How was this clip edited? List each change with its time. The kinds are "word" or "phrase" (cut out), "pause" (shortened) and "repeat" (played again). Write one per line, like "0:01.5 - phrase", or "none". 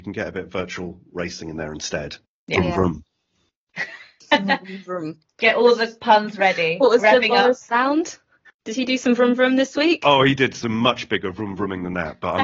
none